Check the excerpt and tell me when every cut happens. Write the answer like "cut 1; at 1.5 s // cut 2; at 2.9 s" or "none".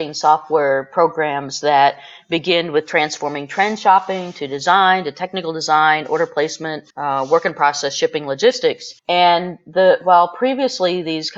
cut 1; at 6.9 s // cut 2; at 9.0 s